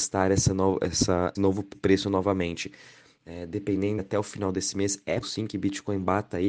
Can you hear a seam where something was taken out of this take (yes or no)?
yes